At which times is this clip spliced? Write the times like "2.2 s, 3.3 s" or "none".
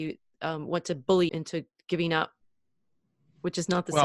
1.3 s